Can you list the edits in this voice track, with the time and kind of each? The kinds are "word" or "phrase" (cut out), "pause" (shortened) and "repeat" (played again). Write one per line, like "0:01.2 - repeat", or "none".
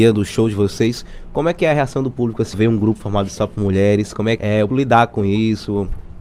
0:02.5 - word
0:04.4 - word
0:04.7 - word

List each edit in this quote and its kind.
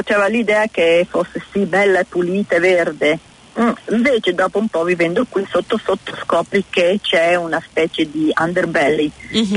none

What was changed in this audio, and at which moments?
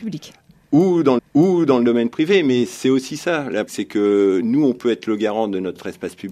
0:01.2 - repeat
0:03.7 - word

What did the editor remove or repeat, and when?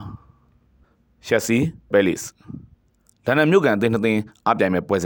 0:01.9 - word

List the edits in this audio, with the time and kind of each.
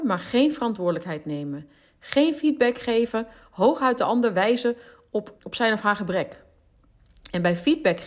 0:05.4 - word

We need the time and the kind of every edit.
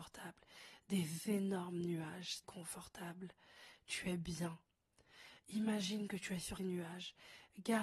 0:02.4 - word
0:06.6 - word

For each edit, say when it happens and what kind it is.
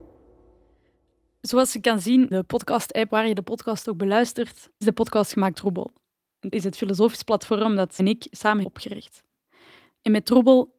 0:02.3 - word
0:03.1 - word
0:04.8 - word
0:05.5 - word
0:06.5 - word
0:08.0 - word
0:08.6 - word

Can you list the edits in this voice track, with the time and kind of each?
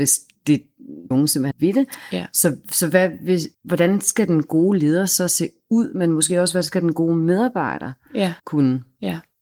0:01.1 - word
0:01.5 - word
0:03.5 - pause
0:08.4 - pause

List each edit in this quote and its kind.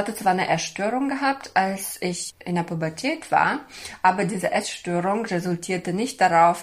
none

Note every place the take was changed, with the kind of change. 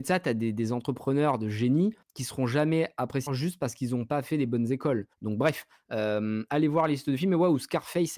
0:02.0 - pause
0:03.3 - phrase
0:05.1 - pause

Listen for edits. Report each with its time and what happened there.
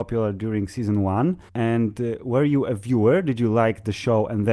0:01.5 - pause

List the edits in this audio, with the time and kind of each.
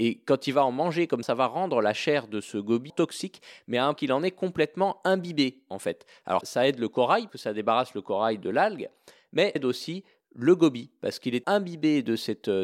0:01.2 - word
0:02.9 - word
0:04.0 - word
0:06.4 - word
0:07.3 - word
0:09.6 - word
0:11.4 - word

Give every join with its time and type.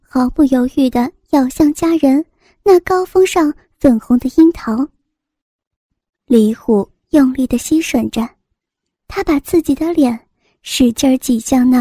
none

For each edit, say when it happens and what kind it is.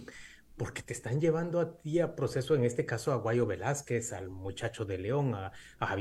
none

